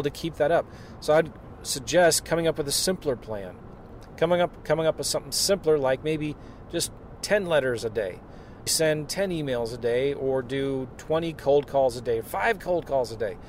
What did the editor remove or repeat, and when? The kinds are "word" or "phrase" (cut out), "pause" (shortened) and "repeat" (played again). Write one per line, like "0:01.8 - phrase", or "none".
0:08.7 - word